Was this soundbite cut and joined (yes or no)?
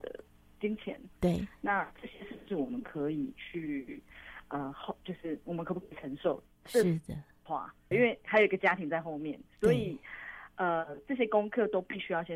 yes